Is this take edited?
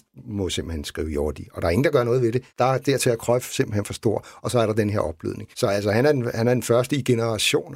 yes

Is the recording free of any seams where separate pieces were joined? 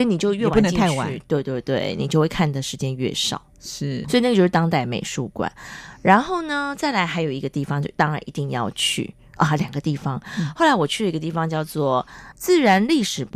no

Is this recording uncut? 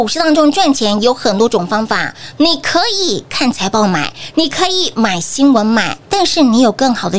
no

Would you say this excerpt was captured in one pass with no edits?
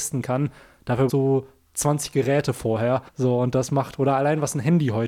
no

